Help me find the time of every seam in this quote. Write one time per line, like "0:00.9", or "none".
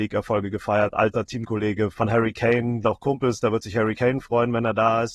0:01.9
0:02.8

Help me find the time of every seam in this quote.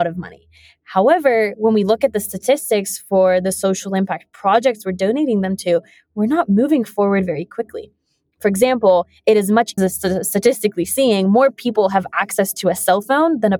0:09.8

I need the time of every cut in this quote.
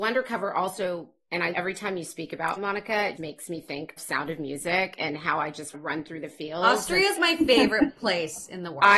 0:01.5
0:02.6
0:03.2
0:04.0
0:05.7
0:07.2

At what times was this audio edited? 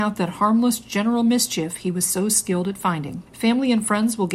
0:03.3

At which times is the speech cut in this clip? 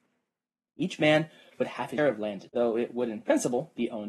0:02.0
0:02.5

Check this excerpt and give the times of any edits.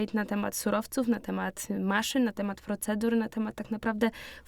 none

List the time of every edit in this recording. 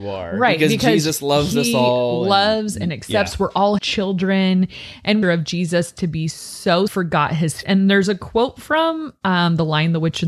0:03.8
0:05.2
0:06.9
0:07.6

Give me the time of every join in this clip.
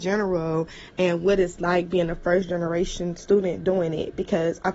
none

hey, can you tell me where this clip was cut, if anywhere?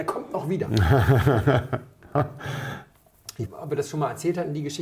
0:03.4

